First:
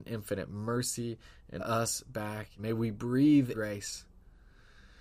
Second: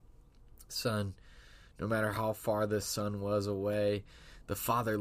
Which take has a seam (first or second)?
first